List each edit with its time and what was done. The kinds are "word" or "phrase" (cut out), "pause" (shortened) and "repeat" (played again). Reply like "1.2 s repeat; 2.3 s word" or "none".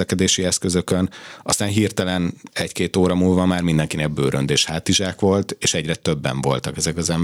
none